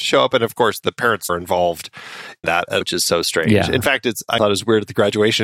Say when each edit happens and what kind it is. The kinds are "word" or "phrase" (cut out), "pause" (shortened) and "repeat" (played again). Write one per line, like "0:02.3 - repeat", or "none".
0:01.3 - word
0:02.4 - word
0:02.8 - word
0:04.4 - word